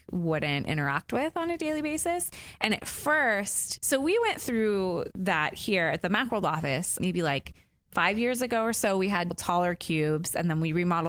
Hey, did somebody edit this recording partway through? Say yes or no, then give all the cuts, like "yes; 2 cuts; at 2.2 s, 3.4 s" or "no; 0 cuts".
yes; 2 cuts; at 7.0 s, 9.3 s